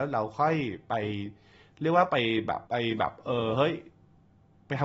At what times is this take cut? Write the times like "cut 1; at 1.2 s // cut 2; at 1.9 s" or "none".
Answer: cut 1; at 2.7 s